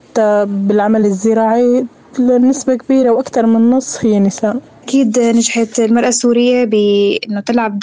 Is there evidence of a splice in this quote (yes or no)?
no